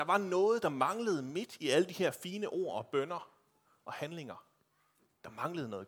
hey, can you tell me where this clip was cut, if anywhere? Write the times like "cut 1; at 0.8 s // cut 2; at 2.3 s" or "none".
none